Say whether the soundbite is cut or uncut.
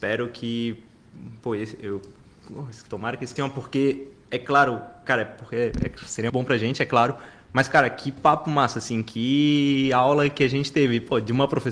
cut